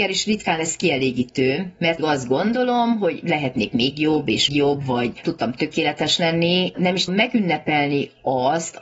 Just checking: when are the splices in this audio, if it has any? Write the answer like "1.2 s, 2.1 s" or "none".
2.0 s, 4.5 s, 5.2 s, 6.7 s, 7.1 s